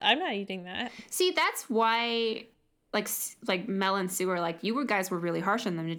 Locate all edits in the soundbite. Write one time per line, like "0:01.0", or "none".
none